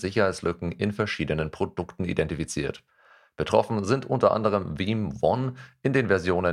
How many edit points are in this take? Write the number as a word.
zero